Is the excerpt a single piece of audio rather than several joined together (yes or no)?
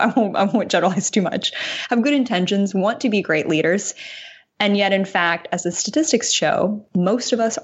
yes